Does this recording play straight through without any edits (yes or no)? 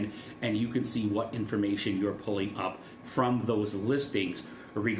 yes